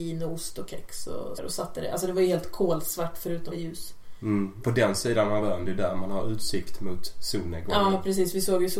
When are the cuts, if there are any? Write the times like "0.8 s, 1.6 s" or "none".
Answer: 1.4 s, 3.5 s, 4.6 s